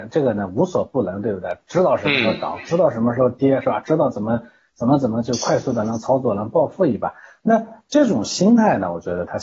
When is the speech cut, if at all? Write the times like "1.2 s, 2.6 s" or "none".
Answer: none